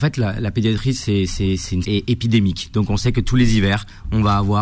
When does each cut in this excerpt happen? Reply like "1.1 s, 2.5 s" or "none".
1.8 s